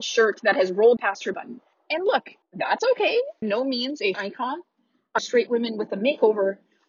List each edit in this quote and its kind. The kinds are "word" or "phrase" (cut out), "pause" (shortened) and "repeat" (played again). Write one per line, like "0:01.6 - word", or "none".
0:01.0 - word
0:01.3 - word
0:02.4 - pause
0:03.4 - phrase
0:04.1 - word
0:05.2 - phrase